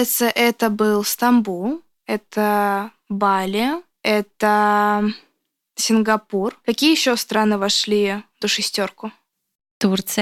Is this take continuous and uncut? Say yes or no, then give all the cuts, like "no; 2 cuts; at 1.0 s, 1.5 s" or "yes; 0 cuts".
no; 1 cut; at 8.4 s